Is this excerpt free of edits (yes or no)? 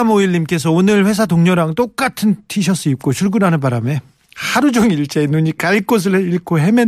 yes